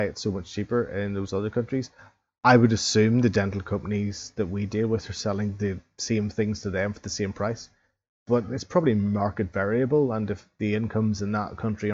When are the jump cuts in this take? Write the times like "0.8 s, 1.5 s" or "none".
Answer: none